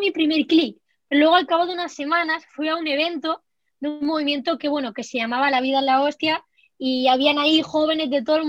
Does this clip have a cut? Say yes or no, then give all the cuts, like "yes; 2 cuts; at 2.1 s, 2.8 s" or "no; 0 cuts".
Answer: no; 0 cuts